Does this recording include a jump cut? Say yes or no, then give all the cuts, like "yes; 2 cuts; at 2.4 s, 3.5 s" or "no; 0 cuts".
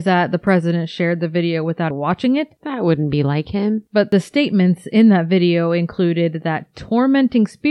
yes; 1 cut; at 1.9 s